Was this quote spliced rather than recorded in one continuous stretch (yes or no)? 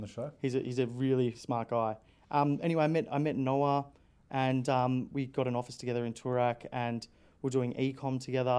yes